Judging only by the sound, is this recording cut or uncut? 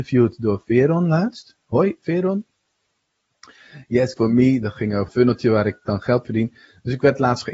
cut